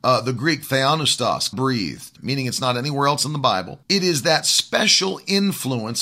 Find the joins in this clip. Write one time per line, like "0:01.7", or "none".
0:01.5
0:02.2
0:03.8